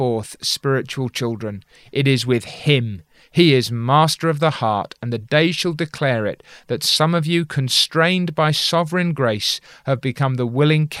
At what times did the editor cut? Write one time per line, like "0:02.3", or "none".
none